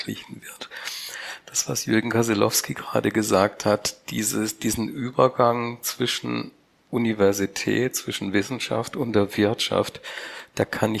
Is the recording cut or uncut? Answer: uncut